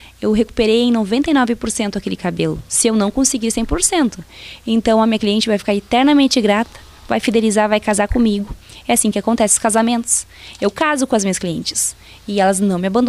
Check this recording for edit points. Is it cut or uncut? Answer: uncut